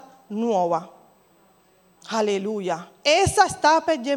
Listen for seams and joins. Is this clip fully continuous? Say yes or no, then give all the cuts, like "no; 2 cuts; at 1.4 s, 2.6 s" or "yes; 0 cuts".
yes; 0 cuts